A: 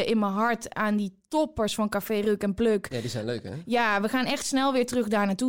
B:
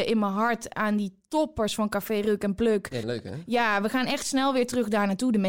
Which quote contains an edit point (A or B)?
B